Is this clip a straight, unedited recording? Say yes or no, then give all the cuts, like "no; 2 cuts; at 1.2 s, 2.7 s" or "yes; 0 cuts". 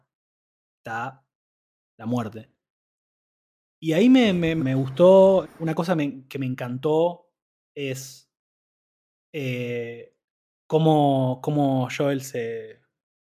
no; 2 cuts; at 4.6 s, 5.4 s